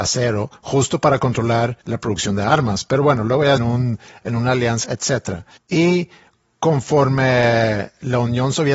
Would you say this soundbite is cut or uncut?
cut